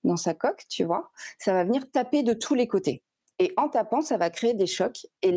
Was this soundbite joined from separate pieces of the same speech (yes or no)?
no